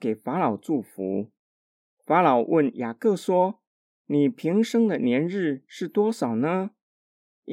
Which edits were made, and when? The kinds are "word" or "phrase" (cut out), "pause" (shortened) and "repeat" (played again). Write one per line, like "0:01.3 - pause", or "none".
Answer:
none